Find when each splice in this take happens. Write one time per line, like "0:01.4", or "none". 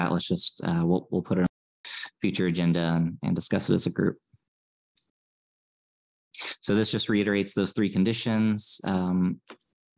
none